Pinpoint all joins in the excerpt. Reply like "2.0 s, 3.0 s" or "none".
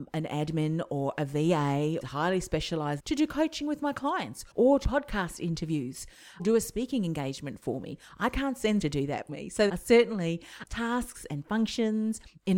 2.0 s, 3.0 s, 4.5 s, 4.8 s, 6.4 s, 8.8 s, 9.3 s, 9.7 s, 10.6 s